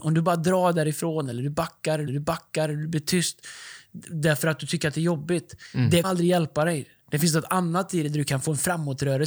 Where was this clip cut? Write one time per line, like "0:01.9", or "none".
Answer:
0:02.1
0:06.0